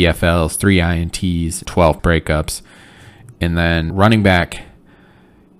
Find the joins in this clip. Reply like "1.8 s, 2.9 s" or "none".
1.7 s, 2.0 s, 3.9 s